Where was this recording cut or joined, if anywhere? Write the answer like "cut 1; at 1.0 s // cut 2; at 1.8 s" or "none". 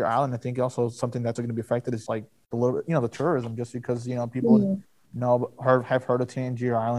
cut 1; at 1.4 s // cut 2; at 2.1 s